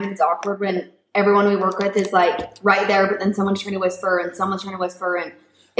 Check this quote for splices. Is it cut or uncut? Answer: uncut